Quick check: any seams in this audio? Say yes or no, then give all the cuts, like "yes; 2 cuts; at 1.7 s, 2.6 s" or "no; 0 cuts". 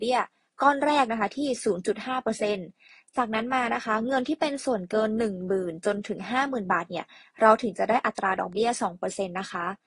no; 0 cuts